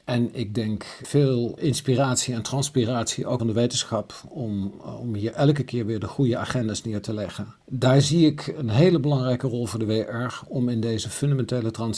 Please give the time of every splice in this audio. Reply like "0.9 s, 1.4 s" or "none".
1.6 s, 3.4 s, 7.6 s